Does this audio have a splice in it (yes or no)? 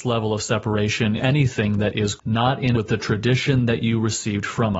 yes